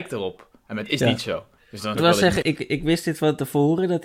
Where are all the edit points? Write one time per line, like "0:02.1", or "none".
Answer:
0:01.6
0:01.9
0:02.4